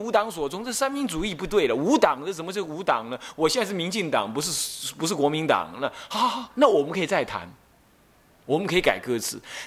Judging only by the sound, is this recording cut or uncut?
uncut